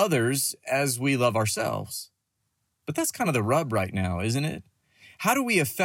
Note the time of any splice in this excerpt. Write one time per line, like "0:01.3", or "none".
none